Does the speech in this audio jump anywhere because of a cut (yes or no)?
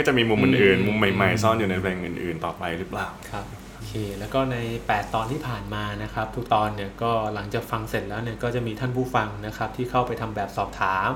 yes